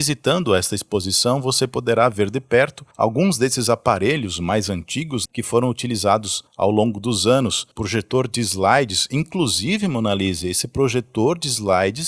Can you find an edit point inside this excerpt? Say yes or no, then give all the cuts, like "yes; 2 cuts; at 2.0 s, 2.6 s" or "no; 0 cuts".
yes; 3 cuts; at 5.3 s, 6.5 s, 7.7 s